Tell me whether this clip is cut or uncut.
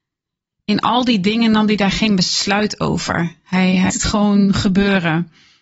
cut